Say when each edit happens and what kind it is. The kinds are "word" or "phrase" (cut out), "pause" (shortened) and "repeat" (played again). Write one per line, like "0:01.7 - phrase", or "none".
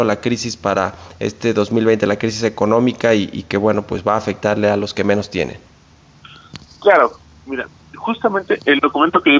none